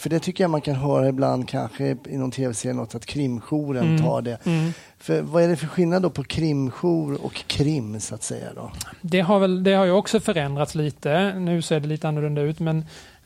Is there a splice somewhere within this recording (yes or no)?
no